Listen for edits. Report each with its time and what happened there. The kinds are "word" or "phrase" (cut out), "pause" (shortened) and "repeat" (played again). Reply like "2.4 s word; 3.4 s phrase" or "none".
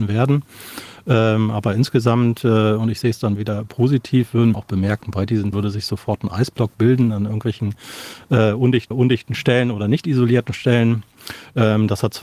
3.4 s word; 4.5 s phrase; 5.5 s word; 8.9 s repeat

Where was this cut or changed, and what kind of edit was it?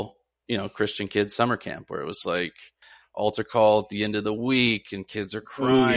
none

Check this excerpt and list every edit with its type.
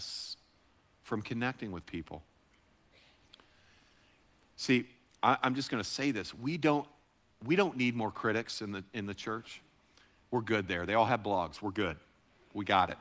none

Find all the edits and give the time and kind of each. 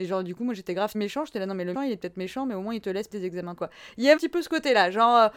0.9 s word; 1.7 s word; 3.1 s word; 3.6 s word; 4.2 s word

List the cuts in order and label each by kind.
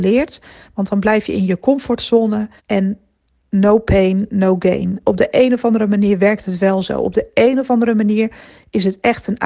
2.6 s pause

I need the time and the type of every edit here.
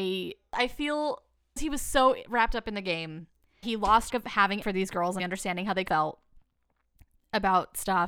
1.6 s word; 3.6 s word; 4.1 s word; 4.6 s word; 5.2 s word; 5.9 s word

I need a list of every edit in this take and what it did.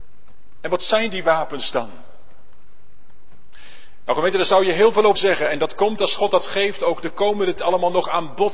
5.2 s word; 7.6 s word

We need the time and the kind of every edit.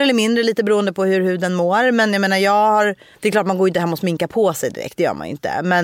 3.1 s pause

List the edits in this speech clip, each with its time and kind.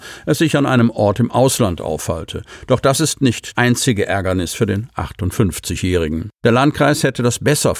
3.5 s word; 6.4 s pause

